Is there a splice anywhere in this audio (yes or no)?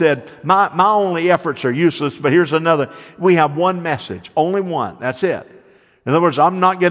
no